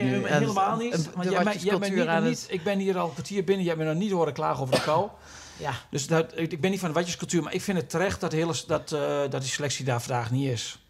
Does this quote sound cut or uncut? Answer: uncut